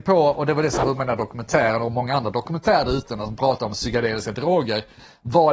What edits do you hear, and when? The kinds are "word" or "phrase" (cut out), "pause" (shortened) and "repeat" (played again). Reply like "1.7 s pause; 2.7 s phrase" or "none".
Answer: 1.0 s word